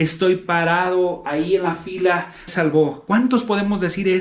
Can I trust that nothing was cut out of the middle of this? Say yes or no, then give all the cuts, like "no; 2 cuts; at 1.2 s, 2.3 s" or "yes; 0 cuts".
no; 1 cut; at 2.5 s